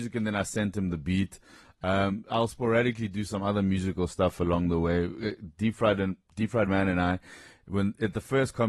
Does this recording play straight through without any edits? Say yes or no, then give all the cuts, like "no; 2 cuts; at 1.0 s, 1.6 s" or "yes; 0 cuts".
yes; 0 cuts